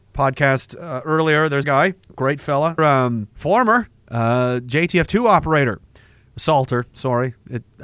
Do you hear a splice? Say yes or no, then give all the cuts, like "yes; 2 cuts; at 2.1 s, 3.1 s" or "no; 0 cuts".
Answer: yes; 4 cuts; at 1.6 s, 2.0 s, 2.8 s, 3.3 s